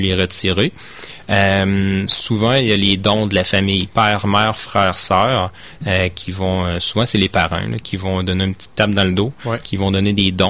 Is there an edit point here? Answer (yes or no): no